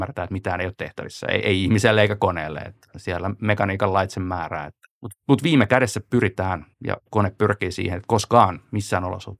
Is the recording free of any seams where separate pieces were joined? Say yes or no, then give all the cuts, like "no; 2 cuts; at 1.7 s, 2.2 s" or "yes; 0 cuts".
no; 2 cuts; at 4.9 s, 6.7 s